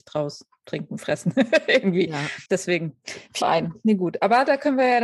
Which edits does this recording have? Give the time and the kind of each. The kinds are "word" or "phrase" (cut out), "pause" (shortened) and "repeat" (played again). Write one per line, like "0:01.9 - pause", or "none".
0:02.5 - pause
0:03.4 - phrase